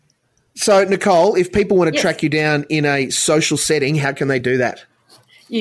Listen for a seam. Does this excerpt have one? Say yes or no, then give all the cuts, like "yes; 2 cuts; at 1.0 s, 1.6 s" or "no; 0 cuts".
no; 0 cuts